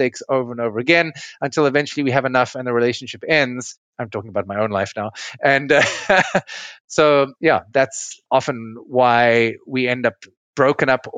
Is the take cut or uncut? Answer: cut